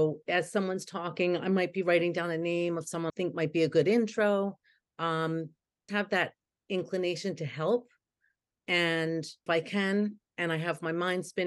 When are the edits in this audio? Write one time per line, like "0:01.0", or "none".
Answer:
0:03.1
0:05.9
0:09.5